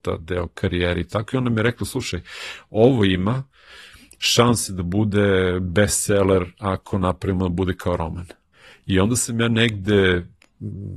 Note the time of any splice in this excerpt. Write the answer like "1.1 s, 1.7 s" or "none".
8.5 s